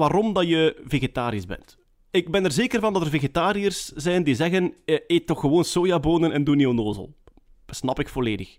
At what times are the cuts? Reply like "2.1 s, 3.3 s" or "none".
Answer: none